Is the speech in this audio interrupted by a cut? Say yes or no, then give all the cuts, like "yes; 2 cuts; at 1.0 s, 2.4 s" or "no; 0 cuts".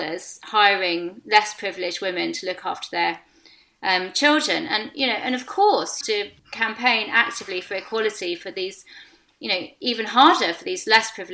yes; 2 cuts; at 6.0 s, 6.4 s